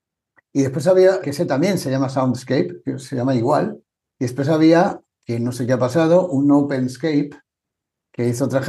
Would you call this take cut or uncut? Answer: cut